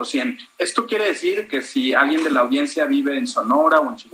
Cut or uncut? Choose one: uncut